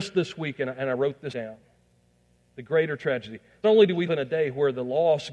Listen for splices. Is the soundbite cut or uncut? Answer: cut